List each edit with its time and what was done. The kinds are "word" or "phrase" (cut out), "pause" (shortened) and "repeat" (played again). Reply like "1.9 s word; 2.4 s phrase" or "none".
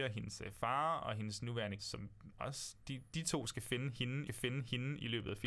1.8 s word; 4.3 s repeat